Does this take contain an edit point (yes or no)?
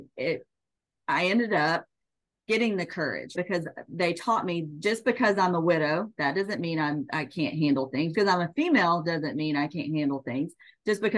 yes